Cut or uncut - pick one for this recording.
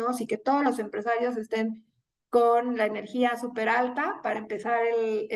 uncut